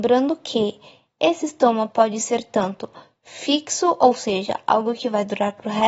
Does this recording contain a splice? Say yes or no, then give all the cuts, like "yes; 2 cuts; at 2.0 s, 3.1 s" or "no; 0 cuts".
no; 0 cuts